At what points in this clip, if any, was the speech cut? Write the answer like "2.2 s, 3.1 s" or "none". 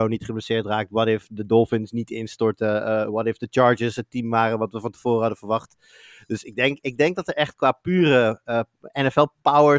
none